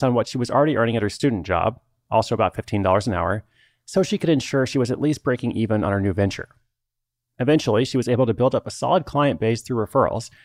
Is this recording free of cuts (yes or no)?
yes